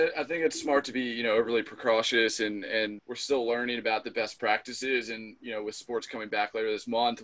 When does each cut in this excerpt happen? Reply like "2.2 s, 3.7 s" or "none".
3.0 s